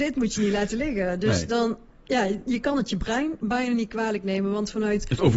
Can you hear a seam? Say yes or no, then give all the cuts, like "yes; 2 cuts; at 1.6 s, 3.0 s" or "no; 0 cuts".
no; 0 cuts